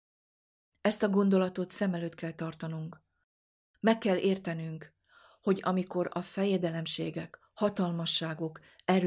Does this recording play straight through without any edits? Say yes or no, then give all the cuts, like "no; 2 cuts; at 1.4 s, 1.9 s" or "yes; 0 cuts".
yes; 0 cuts